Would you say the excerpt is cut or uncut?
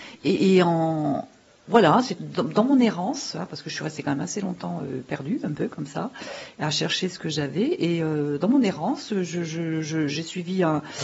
uncut